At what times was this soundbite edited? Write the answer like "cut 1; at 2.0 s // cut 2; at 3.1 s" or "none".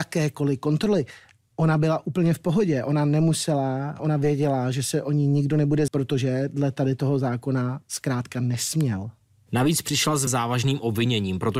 cut 1; at 4.0 s // cut 2; at 5.9 s // cut 3; at 10.3 s